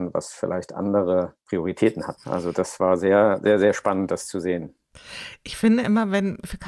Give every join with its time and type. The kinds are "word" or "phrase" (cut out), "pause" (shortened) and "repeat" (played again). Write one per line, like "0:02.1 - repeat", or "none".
0:01.4 - pause